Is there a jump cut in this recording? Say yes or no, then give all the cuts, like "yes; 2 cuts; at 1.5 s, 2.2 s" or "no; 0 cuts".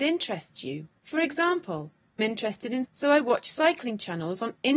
yes; 3 cuts; at 1.0 s, 2.2 s, 2.8 s